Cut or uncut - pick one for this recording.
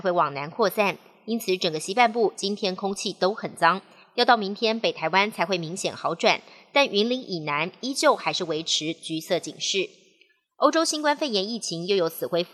uncut